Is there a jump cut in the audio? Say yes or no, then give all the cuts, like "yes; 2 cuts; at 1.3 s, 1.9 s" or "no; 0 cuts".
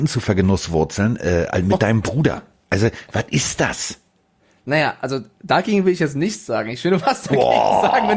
no; 0 cuts